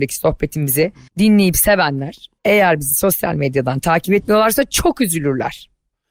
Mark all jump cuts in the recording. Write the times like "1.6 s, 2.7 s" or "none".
1.1 s, 2.4 s